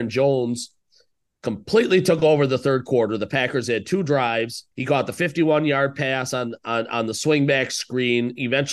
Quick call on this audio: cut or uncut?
cut